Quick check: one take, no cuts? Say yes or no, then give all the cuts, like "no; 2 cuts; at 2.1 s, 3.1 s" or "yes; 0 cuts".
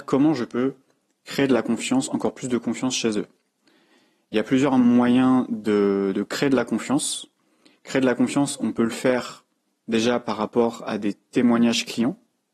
yes; 0 cuts